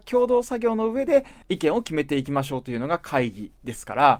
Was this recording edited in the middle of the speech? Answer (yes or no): yes